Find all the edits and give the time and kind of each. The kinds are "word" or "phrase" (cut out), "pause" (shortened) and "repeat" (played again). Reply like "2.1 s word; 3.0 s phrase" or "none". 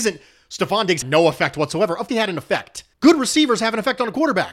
1.0 s word; 2.1 s word; 2.9 s pause